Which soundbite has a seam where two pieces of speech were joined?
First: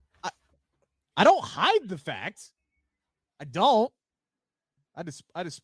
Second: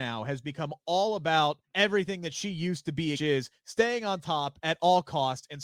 second; 2 cuts; at 1.6 s, 3.1 s

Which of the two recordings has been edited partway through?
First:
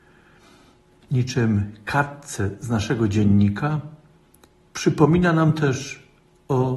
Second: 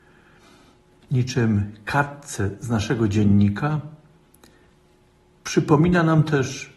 first; 1 cut; at 4.4 s

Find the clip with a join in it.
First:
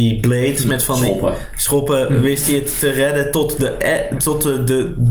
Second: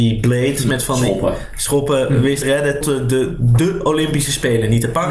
second; 2 cuts; at 2.4 s, 2.8 s

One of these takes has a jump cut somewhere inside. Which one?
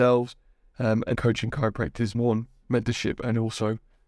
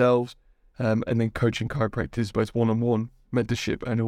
first; 2 cuts; at 1.1 s, 2.1 s

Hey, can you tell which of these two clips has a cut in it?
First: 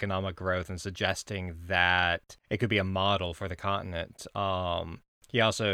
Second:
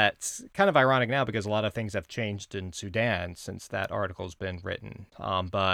first; 1 cut; at 2.4 s

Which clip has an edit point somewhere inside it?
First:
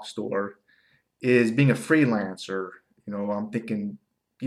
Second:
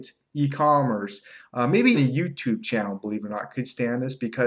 second; 1 cut; at 1.9 s

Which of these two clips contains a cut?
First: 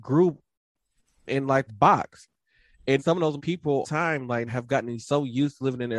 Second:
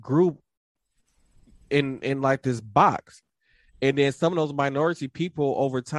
first; 6 cuts; at 1.3 s, 1.7 s, 3.0 s, 3.4 s, 3.8 s, 4.5 s

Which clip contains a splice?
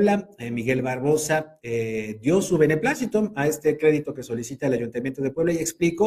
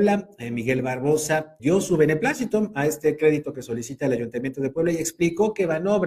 second; 1 cut; at 1.6 s

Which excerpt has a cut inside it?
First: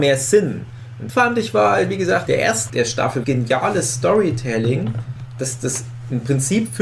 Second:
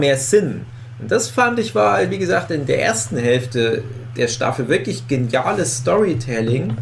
first; 4 cuts; at 1.1 s, 2.3 s, 2.7 s, 3.2 s

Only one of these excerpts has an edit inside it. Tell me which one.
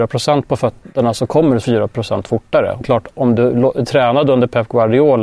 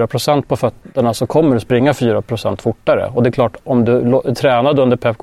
first; 2 cuts; at 1.6 s, 2.8 s

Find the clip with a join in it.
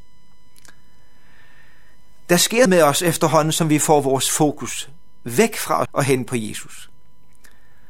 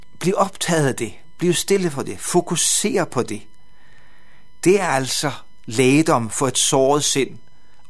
first; 2 cuts; at 2.7 s, 5.9 s

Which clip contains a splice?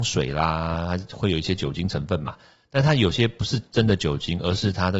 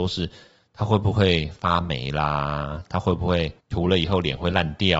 second; 1 cut; at 3.6 s

